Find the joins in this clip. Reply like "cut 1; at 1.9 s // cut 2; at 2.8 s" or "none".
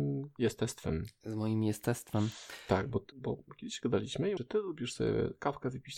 cut 1; at 3.1 s // cut 2; at 4.4 s